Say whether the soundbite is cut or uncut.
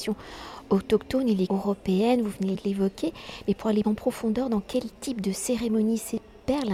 cut